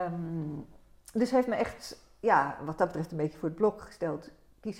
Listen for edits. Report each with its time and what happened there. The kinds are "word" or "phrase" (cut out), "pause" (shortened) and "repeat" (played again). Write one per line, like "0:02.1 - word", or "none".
none